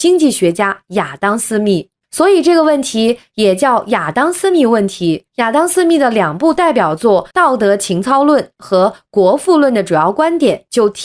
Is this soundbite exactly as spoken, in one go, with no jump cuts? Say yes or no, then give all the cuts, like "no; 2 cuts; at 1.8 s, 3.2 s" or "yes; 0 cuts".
no; 2 cuts; at 5.3 s, 7.3 s